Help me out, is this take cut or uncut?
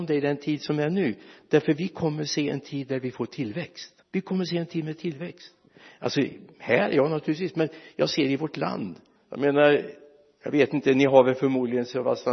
cut